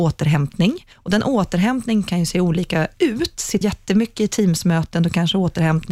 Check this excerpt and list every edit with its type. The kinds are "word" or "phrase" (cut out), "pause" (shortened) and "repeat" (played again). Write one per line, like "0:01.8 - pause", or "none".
0:00.9 - pause
0:03.6 - word